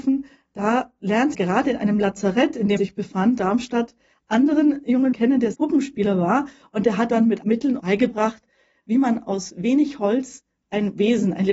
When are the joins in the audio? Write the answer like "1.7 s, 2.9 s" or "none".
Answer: 1.3 s, 2.8 s, 3.4 s, 4.2 s, 5.1 s, 5.5 s, 7.1 s, 7.4 s, 7.8 s